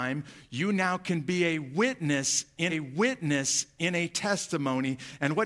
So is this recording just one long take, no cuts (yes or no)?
no